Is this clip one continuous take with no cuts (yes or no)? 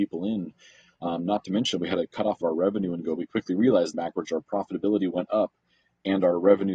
no